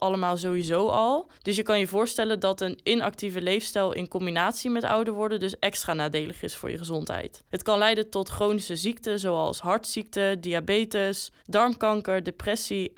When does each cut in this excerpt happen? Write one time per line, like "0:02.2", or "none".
0:01.3
0:07.5
0:11.4